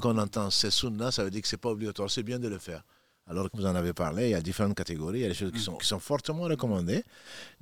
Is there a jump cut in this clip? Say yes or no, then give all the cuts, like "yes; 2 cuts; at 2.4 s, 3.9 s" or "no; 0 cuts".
yes; 2 cuts; at 3.5 s, 5.8 s